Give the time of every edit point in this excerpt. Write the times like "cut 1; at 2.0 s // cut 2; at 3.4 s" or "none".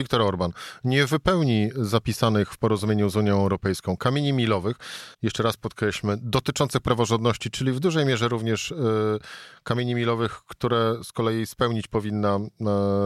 cut 1; at 5.1 s